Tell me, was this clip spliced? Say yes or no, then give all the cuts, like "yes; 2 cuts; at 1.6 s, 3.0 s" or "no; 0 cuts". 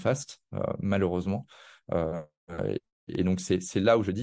no; 0 cuts